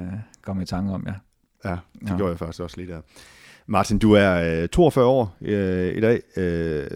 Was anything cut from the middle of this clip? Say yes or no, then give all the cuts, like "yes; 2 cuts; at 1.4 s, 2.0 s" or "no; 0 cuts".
no; 0 cuts